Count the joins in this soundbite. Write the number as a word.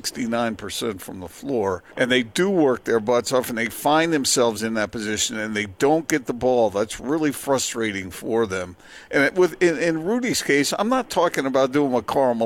one